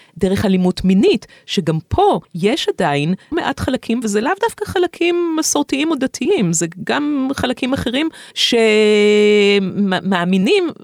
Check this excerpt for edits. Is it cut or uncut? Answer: cut